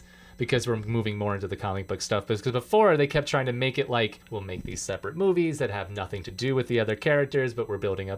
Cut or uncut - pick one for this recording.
cut